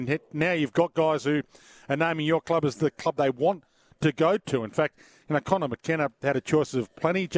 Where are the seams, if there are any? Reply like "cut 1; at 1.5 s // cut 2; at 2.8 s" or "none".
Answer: none

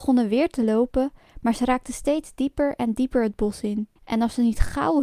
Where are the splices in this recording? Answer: cut 1; at 4.0 s

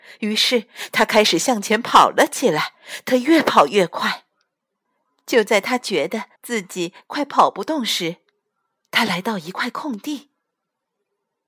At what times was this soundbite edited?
cut 1; at 4.8 s // cut 2; at 6.4 s

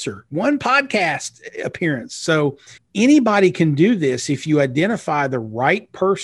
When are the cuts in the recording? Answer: cut 1; at 2.8 s

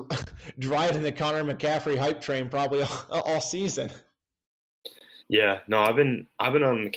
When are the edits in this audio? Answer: cut 1; at 5.2 s

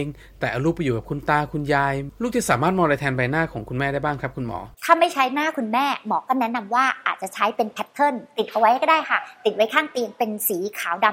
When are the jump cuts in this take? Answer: cut 1; at 4.7 s

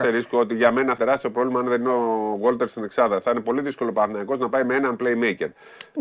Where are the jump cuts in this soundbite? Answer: cut 1; at 1.0 s

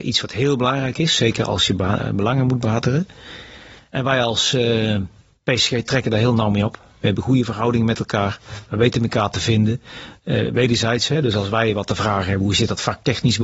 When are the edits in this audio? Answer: cut 1; at 5.2 s

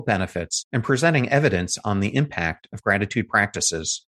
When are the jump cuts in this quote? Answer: none

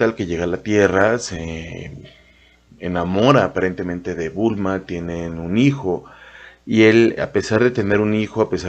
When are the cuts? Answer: cut 1; at 7.2 s

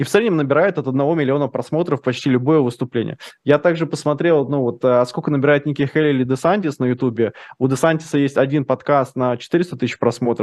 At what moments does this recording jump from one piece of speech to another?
none

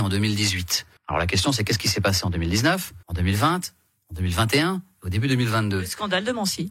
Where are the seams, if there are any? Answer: cut 1; at 1.0 s // cut 2; at 3.0 s

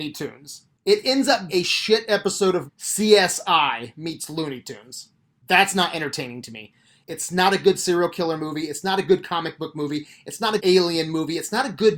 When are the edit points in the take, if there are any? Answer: cut 1; at 1.5 s // cut 2; at 2.7 s // cut 3; at 10.6 s

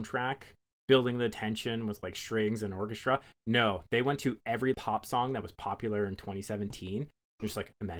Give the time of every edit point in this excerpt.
cut 1; at 4.7 s

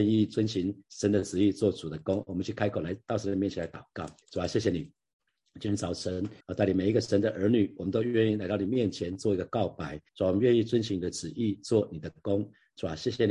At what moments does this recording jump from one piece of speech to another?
cut 1; at 4.2 s // cut 2; at 6.4 s // cut 3; at 10.1 s

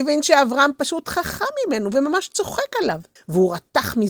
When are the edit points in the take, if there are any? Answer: cut 1; at 3.2 s

